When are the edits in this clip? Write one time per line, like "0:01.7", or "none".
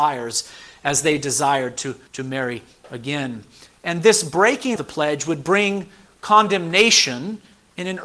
0:02.1
0:04.8